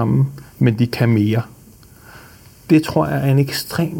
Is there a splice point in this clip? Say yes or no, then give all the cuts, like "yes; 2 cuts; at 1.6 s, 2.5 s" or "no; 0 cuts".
no; 0 cuts